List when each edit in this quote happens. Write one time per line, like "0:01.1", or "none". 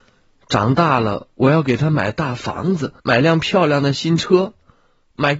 0:03.0